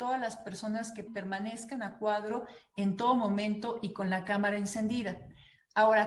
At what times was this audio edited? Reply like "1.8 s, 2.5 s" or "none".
1.1 s